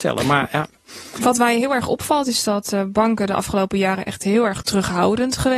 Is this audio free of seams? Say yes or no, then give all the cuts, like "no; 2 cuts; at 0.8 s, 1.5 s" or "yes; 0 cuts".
yes; 0 cuts